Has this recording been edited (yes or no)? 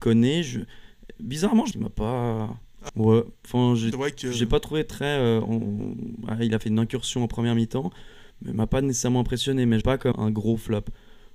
yes